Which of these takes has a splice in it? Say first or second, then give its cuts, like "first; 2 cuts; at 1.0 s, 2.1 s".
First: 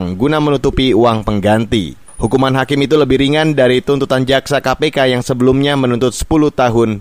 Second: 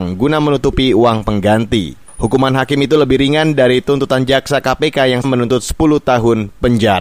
second; 1 cut; at 5.2 s